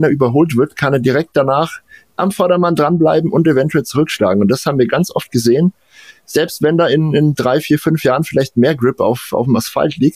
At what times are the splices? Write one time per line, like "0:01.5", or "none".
none